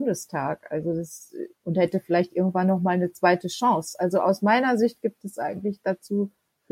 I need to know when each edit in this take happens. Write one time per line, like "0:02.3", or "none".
0:01.5

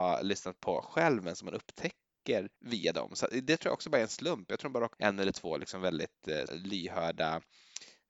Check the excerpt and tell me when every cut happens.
0:02.6
0:04.9
0:06.5

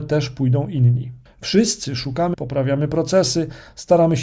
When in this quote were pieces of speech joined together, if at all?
0:01.3
0:02.3

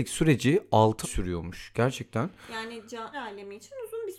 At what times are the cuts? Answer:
0:01.0
0:03.1

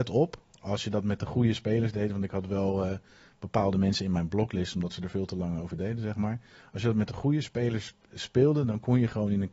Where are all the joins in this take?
none

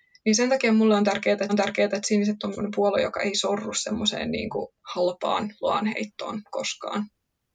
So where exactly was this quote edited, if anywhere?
0:01.5
0:02.5
0:04.8

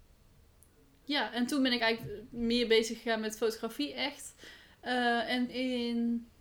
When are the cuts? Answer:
0:05.5

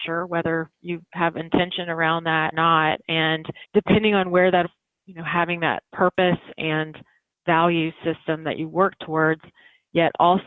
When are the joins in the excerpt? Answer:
0:02.5
0:03.6
0:04.6
0:05.9

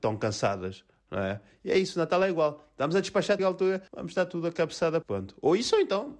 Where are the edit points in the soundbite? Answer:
0:03.4
0:03.9
0:05.0

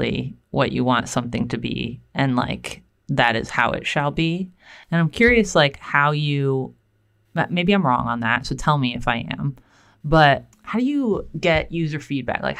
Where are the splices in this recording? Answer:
0:10.5

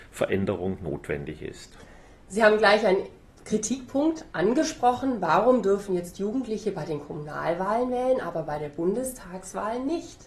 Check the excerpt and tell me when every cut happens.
none

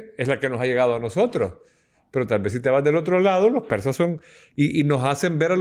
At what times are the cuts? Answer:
none

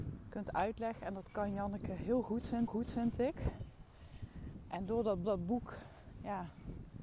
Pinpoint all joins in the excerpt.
0:02.7
0:05.2

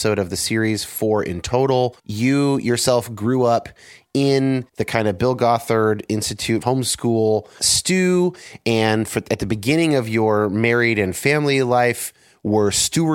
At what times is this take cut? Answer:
0:02.0
0:04.7
0:06.6
0:07.6

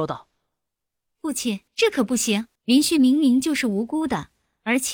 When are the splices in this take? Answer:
0:01.7
0:02.6

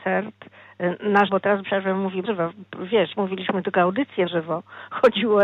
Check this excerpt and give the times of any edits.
0:01.3
0:01.6
0:02.2
0:03.1
0:04.3

